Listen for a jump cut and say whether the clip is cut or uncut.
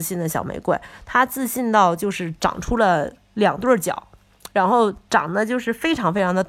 uncut